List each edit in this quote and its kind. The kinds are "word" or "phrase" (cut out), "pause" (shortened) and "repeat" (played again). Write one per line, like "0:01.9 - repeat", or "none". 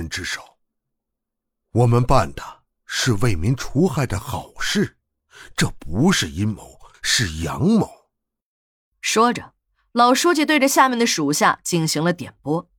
none